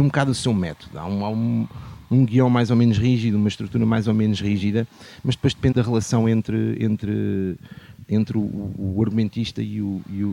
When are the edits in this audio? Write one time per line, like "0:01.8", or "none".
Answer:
0:05.7